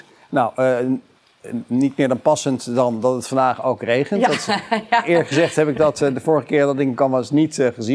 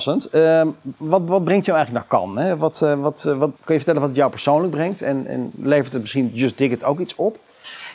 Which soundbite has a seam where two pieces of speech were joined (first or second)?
second